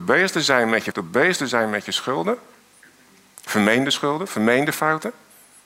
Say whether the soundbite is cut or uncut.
cut